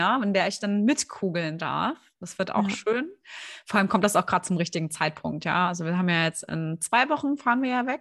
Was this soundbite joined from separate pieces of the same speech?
no; 0 cuts

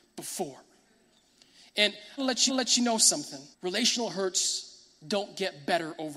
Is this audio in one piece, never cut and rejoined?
no; 3 cuts; at 2.2 s, 2.5 s, 3.5 s

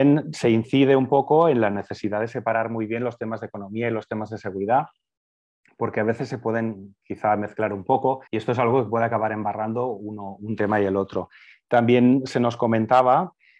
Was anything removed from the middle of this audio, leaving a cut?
yes; 1 cut; at 8.3 s

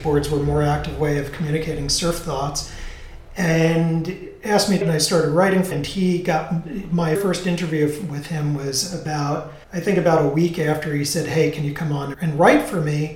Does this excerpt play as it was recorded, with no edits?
no; 5 cuts; at 4.8 s, 5.7 s, 7.2 s, 9.6 s, 12.1 s

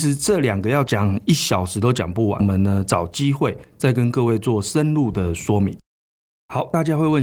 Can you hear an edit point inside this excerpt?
no; 0 cuts

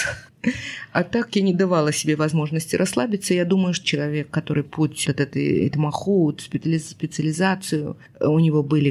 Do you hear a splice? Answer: yes; 3 cuts; at 3.8 s, 4.6 s, 5.0 s

